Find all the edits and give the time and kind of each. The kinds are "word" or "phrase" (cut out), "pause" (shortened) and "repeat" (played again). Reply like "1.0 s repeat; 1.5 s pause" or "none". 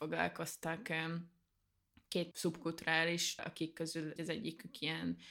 2.3 s word; 3.4 s word; 4.2 s word